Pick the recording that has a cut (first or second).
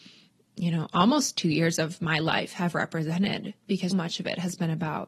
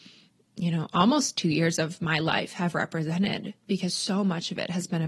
first